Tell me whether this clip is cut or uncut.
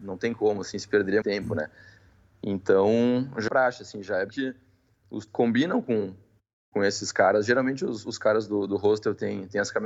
cut